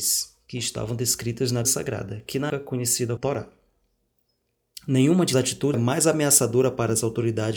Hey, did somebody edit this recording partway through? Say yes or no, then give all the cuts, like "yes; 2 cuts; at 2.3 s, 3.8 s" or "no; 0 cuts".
yes; 5 cuts; at 1.6 s, 2.5 s, 3.2 s, 5.3 s, 5.7 s